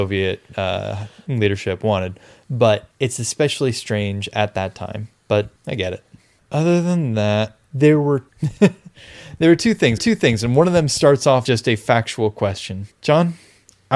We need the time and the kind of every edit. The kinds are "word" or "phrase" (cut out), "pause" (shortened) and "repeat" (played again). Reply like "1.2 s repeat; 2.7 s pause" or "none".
2.9 s pause; 5.6 s pause; 7.6 s pause; 10.0 s repeat; 11.5 s word; 12.9 s word